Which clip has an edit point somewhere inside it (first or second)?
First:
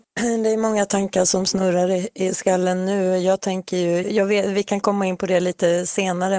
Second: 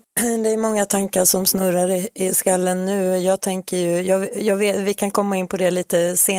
first